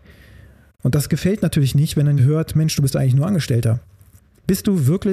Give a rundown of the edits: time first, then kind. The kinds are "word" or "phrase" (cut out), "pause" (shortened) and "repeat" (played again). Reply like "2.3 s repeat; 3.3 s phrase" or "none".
2.2 s word